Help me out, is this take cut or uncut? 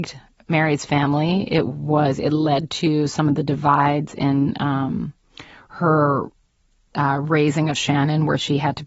uncut